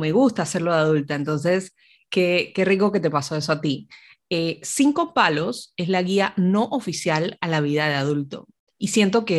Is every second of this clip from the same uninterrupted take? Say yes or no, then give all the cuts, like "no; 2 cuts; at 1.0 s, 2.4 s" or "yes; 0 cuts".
yes; 0 cuts